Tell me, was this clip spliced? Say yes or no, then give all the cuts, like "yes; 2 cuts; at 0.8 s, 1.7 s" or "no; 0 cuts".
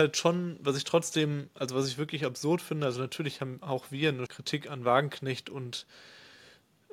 yes; 1 cut; at 4.3 s